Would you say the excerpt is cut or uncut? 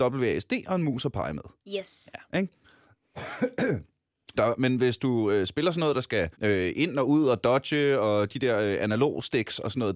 cut